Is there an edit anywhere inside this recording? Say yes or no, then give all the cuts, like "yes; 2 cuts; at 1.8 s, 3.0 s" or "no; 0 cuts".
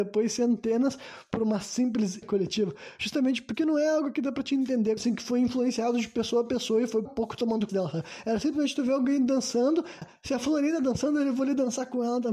yes; 5 cuts; at 2.2 s, 5.0 s, 7.1 s, 7.7 s, 10.0 s